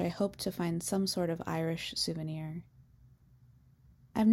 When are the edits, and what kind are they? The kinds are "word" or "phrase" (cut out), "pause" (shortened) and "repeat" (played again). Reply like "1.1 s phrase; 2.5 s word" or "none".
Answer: none